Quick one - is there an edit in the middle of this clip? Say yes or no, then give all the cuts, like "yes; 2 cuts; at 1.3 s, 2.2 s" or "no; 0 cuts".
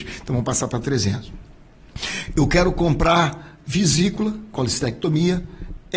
yes; 1 cut; at 4.5 s